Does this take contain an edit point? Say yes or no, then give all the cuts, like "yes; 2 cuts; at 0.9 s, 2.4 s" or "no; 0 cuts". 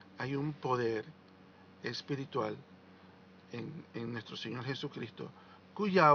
no; 0 cuts